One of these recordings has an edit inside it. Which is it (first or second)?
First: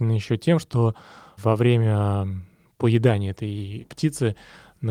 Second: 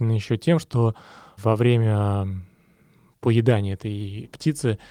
first